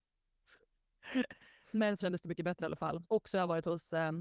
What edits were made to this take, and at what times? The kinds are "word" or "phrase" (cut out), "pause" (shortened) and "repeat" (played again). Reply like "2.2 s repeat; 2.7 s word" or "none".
2.0 s word; 3.1 s pause